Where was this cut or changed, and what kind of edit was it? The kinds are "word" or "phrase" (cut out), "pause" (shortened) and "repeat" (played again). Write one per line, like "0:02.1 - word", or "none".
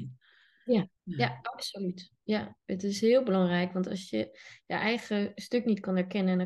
0:01.0 - pause